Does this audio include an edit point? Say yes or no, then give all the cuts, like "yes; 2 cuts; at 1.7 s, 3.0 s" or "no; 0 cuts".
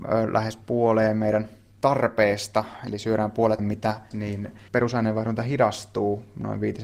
yes; 4 cuts; at 1.8 s, 3.6 s, 4.1 s, 4.7 s